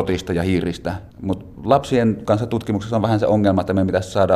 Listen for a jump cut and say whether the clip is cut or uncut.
cut